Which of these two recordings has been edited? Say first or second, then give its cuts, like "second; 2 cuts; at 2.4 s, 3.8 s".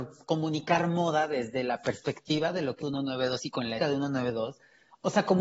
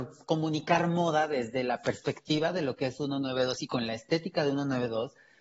first; 2 cuts; at 2.8 s, 3.8 s